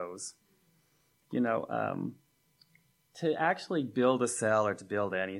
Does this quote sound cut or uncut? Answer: uncut